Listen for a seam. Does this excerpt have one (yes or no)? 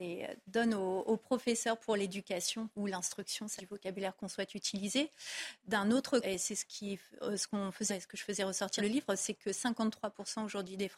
yes